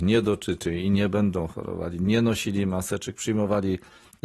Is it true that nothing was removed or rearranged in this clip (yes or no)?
yes